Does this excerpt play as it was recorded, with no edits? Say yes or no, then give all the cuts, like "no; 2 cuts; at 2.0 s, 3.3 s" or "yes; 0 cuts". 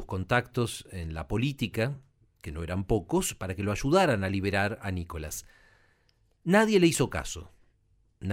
yes; 0 cuts